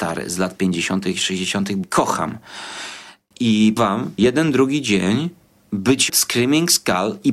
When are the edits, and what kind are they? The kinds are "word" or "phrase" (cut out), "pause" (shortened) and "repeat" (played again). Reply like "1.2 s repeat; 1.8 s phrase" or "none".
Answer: 1.8 s word; 3.8 s word; 4.2 s word; 6.1 s word